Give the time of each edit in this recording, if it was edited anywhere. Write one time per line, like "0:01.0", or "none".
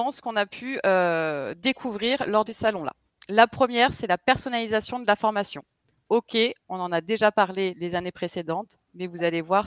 0:02.5